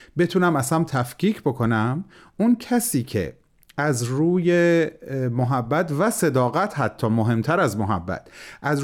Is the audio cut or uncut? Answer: uncut